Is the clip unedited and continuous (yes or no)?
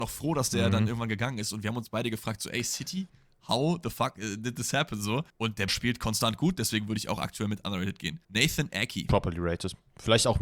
no